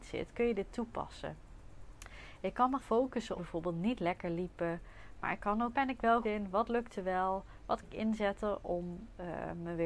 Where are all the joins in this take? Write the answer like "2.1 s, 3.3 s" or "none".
2.8 s, 3.4 s, 5.7 s, 6.2 s, 7.8 s

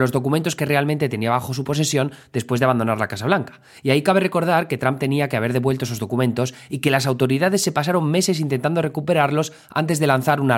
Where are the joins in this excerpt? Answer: none

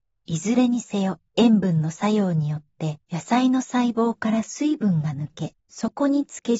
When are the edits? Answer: 1.3 s, 3.0 s, 5.6 s

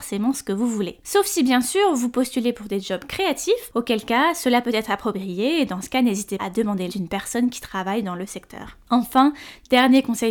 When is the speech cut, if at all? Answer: 6.4 s, 6.9 s

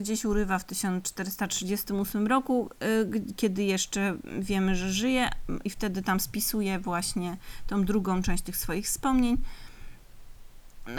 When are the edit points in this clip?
none

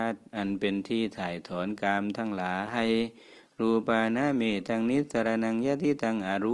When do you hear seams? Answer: none

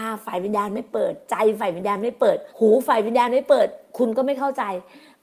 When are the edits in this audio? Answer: 2.5 s

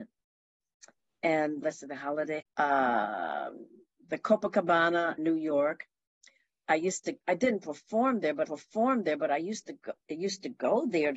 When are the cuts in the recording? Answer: 1.6 s, 2.4 s, 5.2 s, 7.2 s, 8.4 s

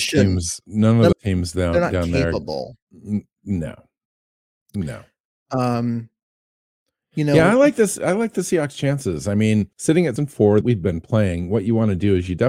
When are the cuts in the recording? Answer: 1.1 s, 9.7 s, 10.2 s, 10.6 s

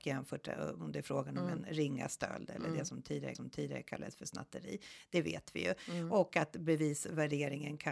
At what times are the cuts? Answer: 3.4 s

